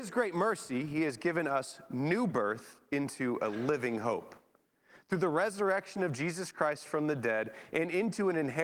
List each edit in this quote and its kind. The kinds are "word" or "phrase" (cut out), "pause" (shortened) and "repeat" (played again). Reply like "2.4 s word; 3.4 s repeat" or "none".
none